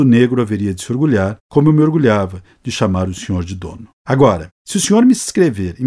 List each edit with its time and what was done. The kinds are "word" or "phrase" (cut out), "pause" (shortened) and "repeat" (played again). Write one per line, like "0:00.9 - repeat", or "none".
0:03.9 - pause